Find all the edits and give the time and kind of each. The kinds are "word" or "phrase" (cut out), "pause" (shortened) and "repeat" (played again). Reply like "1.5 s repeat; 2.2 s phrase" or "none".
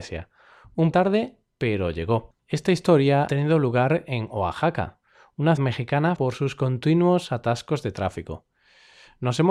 0.9 s word; 2.4 s pause; 3.3 s word; 5.6 s word; 6.2 s word

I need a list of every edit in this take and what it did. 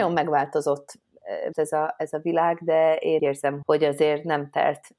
1.5 s word; 3.2 s word; 3.6 s word

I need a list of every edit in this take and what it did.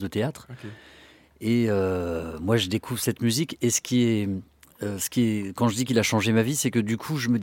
none

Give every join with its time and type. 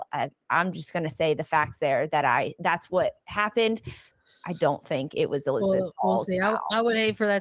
none

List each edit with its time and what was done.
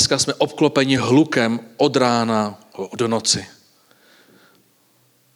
none

